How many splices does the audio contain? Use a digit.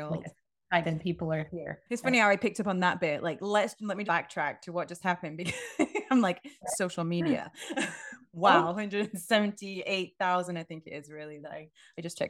2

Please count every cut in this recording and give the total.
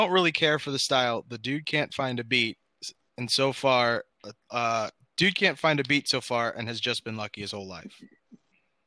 0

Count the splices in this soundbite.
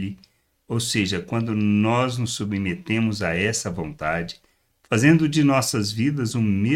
0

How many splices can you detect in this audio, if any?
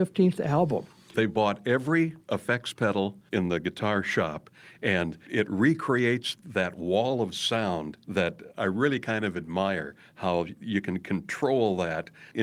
1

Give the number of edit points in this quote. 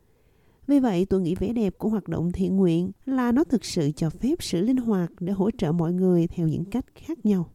1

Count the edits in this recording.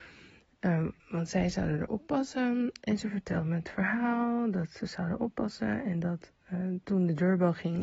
1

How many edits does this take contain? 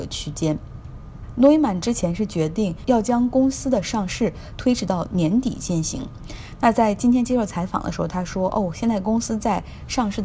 0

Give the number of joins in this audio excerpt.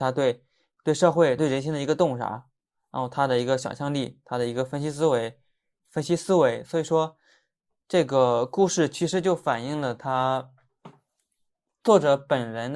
1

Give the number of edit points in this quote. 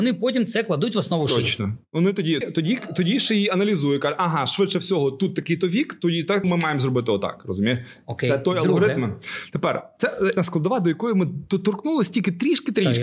3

